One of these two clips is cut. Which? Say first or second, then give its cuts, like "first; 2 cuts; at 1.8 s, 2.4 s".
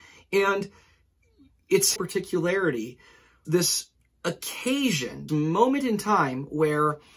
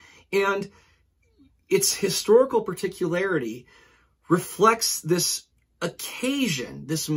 first; 3 cuts; at 2.0 s, 3.4 s, 5.3 s